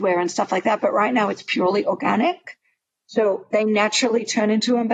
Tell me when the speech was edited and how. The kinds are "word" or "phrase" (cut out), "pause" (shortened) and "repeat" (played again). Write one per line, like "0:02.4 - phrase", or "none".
none